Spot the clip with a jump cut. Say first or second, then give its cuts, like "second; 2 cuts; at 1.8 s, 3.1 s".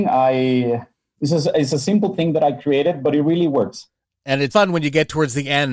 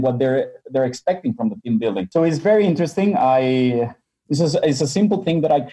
first; 1 cut; at 4.5 s